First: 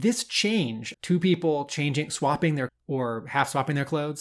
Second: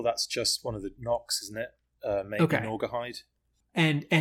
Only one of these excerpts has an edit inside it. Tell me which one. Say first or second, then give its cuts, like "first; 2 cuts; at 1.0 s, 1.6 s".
first; 2 cuts; at 0.9 s, 2.7 s